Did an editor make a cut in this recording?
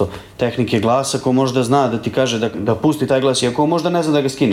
yes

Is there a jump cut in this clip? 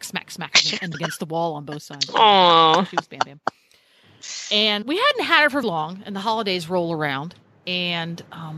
yes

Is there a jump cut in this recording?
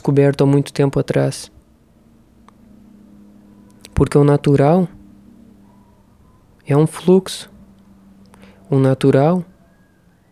no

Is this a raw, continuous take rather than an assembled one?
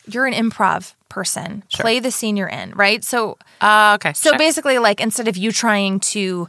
yes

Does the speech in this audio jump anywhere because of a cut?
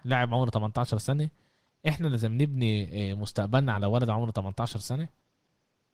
no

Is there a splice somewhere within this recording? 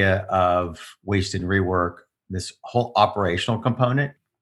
no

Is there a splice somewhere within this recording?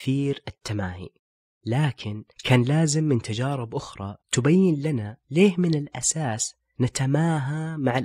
yes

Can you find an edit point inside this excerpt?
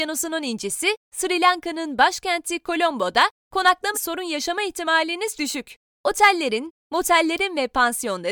yes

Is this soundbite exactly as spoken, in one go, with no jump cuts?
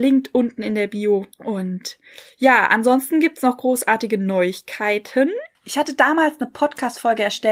no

